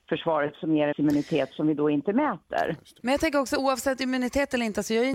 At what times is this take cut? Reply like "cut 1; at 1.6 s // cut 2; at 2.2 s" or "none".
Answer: cut 1; at 0.9 s